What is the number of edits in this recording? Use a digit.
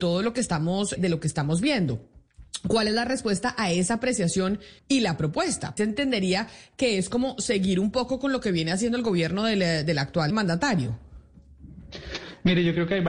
4